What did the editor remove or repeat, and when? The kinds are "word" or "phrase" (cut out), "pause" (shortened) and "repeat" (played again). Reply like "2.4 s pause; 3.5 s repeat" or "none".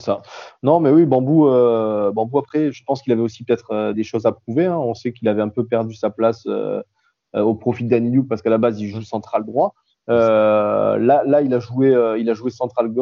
3.9 s word